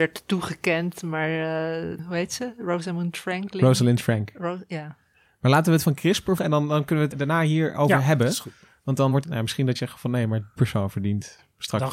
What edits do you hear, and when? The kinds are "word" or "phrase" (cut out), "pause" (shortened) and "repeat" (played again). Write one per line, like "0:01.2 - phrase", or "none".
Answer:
0:02.0 - word
0:05.8 - word
0:06.4 - word
0:07.1 - word
0:09.2 - word
0:09.8 - word
0:10.6 - word